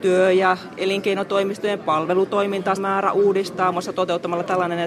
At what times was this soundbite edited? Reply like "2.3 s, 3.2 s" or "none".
2.8 s, 3.7 s

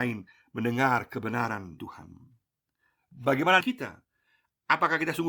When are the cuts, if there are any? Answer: 1.8 s, 3.6 s

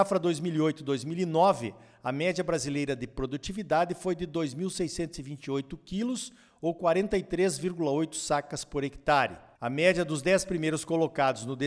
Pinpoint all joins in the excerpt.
none

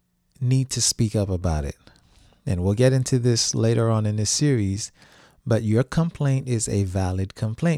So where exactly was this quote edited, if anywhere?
none

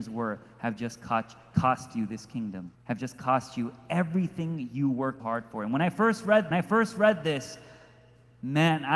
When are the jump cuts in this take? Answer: 2.7 s, 5.2 s, 6.5 s

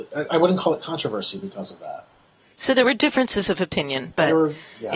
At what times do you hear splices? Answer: none

